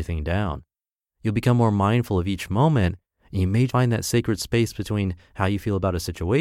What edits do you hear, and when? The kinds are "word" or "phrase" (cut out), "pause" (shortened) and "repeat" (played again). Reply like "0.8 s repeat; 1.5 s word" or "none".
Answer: 3.7 s word